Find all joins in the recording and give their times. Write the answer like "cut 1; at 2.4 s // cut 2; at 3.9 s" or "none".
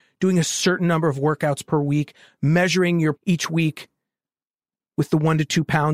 cut 1; at 3.1 s